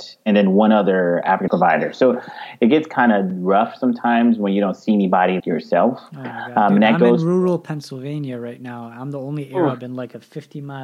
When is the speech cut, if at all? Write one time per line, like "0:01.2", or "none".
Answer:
0:01.5
0:05.4